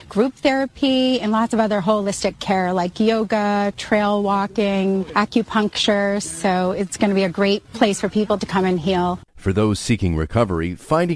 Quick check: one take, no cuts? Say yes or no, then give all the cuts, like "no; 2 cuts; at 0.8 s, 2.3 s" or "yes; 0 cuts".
no; 1 cut; at 9.3 s